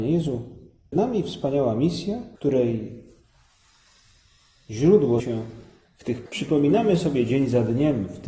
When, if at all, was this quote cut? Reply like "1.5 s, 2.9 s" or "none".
0.9 s, 2.4 s, 5.2 s, 6.3 s